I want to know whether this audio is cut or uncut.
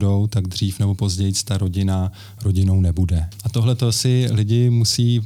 uncut